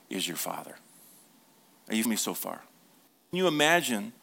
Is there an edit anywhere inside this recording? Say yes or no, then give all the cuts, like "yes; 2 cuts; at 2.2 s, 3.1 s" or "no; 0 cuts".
yes; 2 cuts; at 2.0 s, 3.3 s